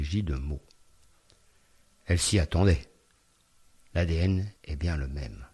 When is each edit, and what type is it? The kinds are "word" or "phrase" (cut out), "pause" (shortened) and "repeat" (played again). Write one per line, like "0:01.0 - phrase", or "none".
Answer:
0:04.6 - pause

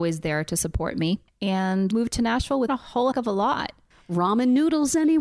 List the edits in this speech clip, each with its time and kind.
0:01.9 - word
0:02.7 - word
0:03.1 - word

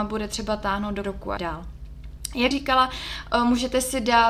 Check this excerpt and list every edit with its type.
0:01.0 - word
0:01.4 - word
0:02.5 - word

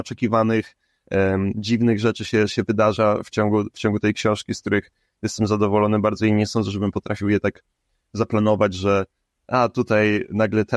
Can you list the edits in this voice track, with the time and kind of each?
none

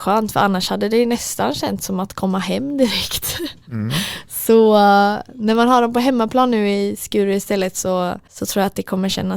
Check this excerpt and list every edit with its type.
0:08.3 - pause

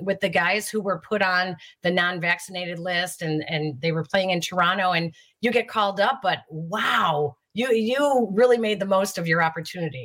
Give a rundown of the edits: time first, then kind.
none

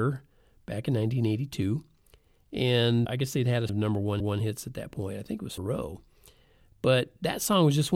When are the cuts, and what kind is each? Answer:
0:03.0 - word
0:03.7 - word
0:04.2 - repeat
0:05.6 - phrase

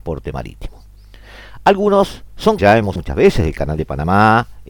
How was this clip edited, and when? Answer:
0:02.6 - phrase
0:03.0 - word

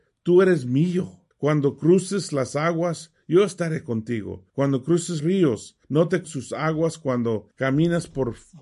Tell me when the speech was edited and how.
0:01.3 - pause
0:04.5 - pause
0:05.2 - word
0:05.8 - pause
0:06.2 - word
0:07.5 - pause

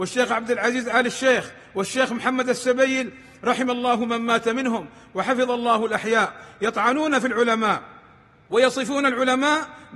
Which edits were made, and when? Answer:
none

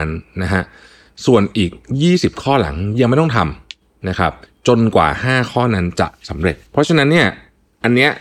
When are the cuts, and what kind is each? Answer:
0:04.5 - pause
0:06.7 - pause

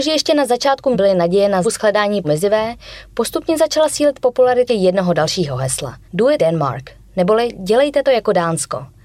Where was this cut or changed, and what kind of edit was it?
0:00.9 - word
0:01.6 - word
0:02.2 - word
0:04.7 - word
0:06.0 - pause
0:06.4 - word

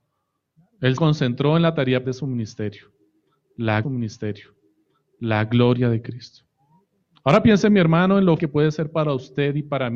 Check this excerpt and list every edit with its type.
0:01.0 - word
0:02.0 - word
0:03.8 - repeat
0:08.4 - word

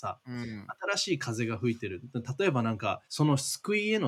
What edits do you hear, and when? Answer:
0:03.0 - pause

